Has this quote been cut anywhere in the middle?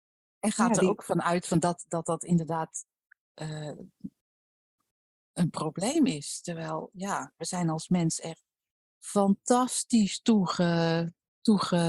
no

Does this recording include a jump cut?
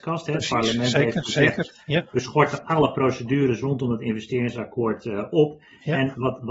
no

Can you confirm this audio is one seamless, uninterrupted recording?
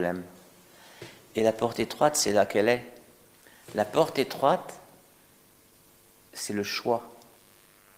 yes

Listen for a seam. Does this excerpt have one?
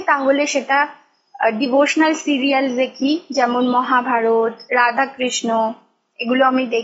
yes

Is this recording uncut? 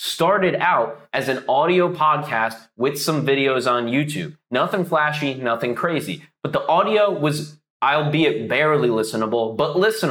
no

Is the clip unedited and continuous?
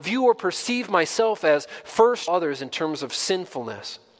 no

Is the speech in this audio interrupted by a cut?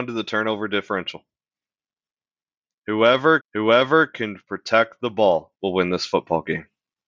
yes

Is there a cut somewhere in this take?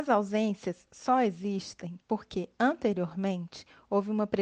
yes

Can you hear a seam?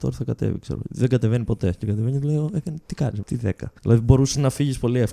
yes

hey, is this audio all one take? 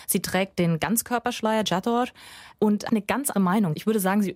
no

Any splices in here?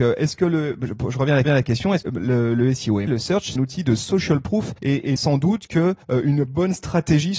yes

